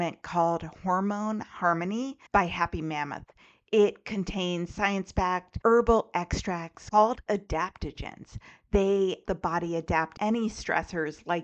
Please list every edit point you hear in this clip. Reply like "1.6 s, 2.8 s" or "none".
9.2 s, 10.1 s